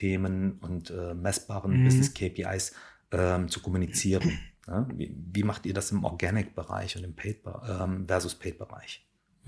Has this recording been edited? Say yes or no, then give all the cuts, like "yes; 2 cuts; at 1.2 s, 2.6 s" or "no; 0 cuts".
no; 0 cuts